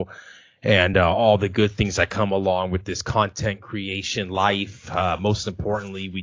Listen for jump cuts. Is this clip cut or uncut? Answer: uncut